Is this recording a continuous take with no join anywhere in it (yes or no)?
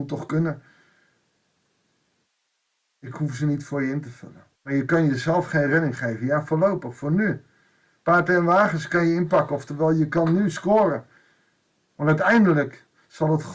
no